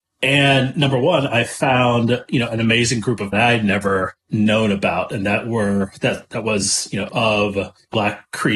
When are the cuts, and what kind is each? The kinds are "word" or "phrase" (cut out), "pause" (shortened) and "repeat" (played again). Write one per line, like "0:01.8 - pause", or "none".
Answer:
0:03.3 - phrase
0:04.2 - pause
0:07.1 - phrase

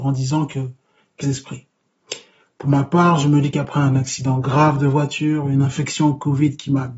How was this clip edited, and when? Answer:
0:01.2 - phrase

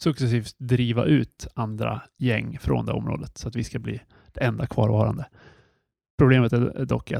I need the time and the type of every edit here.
none

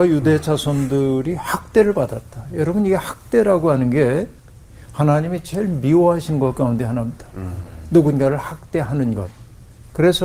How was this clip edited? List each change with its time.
none

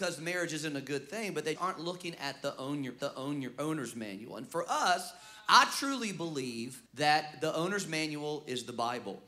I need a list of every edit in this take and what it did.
0:01.6 - word
0:03.0 - repeat
0:06.9 - pause

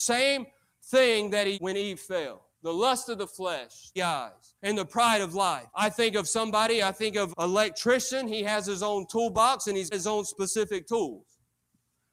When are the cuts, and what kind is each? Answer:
0:01.5 - word
0:02.5 - pause
0:04.0 - phrase
0:04.6 - pause
0:05.7 - pause
0:07.3 - word
0:09.9 - word

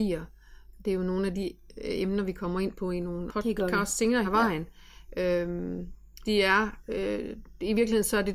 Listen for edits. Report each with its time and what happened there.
0:03.3 - word
0:04.2 - word
0:06.2 - word

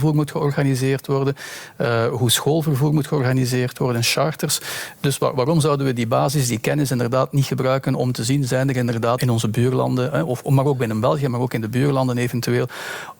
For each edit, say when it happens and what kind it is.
0:09.2 - word

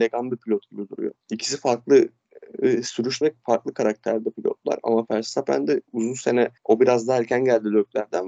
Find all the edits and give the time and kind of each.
0:01.2 - pause
0:03.2 - word
0:06.6 - pause

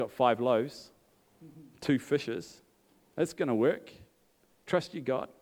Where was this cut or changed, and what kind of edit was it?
none

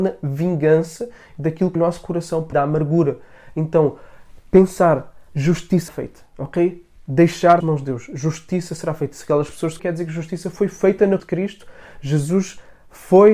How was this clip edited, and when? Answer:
0:01.8 - word
0:02.5 - word
0:05.9 - word
0:07.6 - word
0:09.8 - word
0:11.2 - word

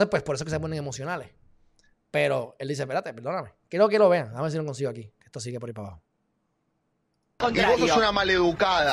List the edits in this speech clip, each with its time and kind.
none

